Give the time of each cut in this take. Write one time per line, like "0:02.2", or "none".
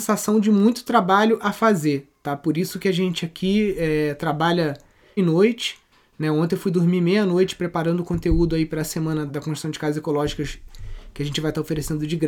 0:01.4
0:05.2
0:09.3

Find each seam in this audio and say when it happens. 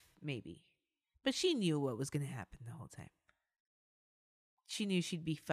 none

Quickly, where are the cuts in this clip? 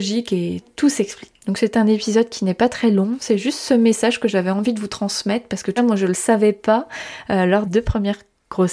0:05.8
0:07.7

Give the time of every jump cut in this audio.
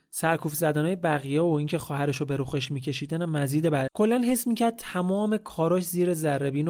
0:03.9

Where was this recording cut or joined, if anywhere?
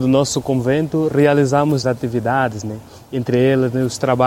0:01.8

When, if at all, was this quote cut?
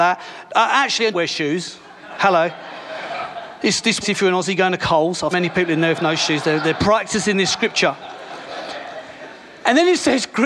0:01.1
0:04.0
0:05.3
0:06.7

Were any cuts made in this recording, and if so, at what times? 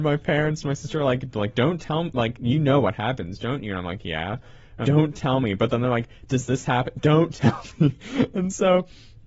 0:04.8

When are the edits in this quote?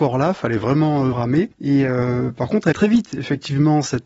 0:01.1
0:02.7

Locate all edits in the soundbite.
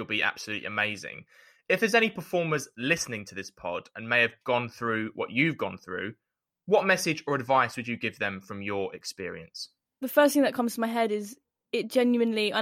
none

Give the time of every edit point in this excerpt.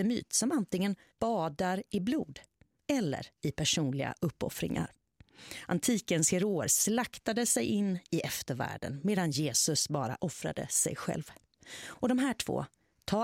0:03.3

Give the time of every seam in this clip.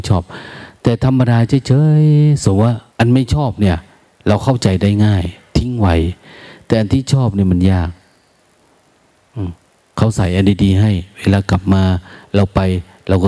0:02.9
0:09.7

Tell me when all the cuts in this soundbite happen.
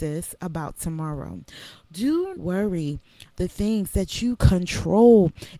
0:02.3
0:03.4
0:04.4

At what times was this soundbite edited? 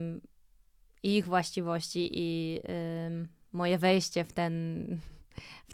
none

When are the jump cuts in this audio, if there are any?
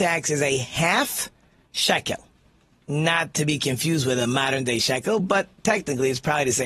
none

